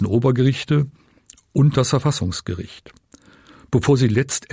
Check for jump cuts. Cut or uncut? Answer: uncut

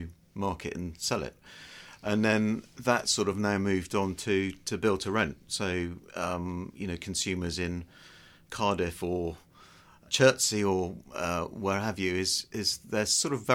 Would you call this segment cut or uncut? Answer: uncut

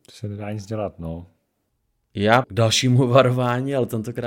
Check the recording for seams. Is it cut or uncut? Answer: cut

